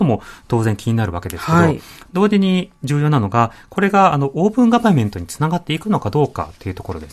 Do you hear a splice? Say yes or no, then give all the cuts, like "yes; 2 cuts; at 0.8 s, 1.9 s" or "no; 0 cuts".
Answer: no; 0 cuts